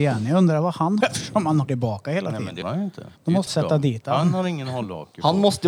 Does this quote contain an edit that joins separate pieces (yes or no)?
yes